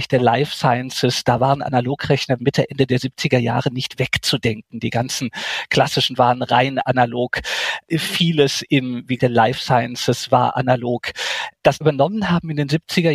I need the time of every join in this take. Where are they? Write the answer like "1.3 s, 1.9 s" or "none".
2.4 s, 6.2 s, 9.2 s, 11.8 s